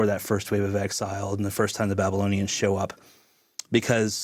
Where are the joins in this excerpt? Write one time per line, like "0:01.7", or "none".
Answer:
none